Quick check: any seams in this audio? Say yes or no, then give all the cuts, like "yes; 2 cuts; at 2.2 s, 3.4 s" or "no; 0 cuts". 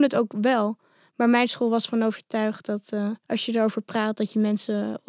yes; 1 cut; at 3.2 s